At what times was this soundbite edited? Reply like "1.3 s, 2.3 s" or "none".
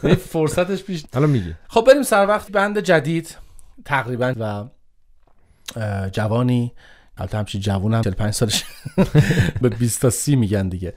1.1 s, 1.6 s, 2.5 s, 4.3 s, 7.2 s, 8.0 s, 9.6 s

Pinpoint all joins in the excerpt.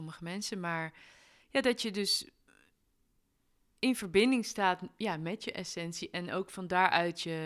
none

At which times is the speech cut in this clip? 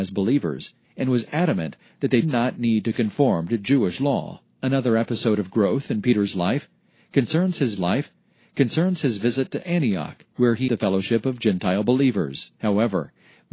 2.2 s, 4.5 s, 7.8 s, 10.3 s, 10.7 s, 12.5 s

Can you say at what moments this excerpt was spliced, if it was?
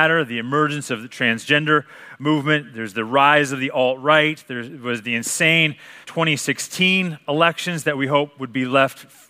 6.0 s

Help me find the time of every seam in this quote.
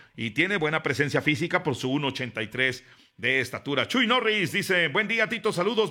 none

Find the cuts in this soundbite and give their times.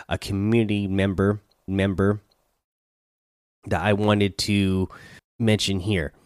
1.7 s, 5.2 s

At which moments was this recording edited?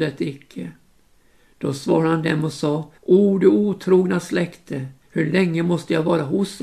3.0 s

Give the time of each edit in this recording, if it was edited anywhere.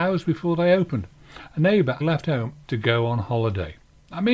2.0 s, 2.6 s

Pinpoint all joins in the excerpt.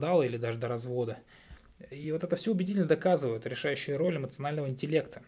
none

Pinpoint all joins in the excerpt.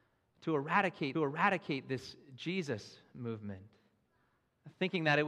1.1 s

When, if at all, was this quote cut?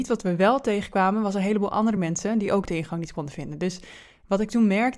none

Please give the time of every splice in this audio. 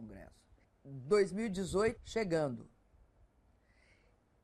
2.0 s

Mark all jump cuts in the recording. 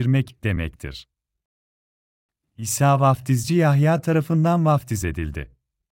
none

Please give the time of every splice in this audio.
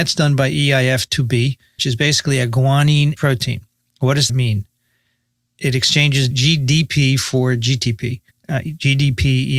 1.8 s, 3.2 s, 4.3 s, 6.3 s, 8.3 s

